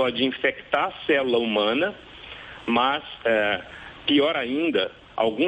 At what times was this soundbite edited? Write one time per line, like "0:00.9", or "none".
none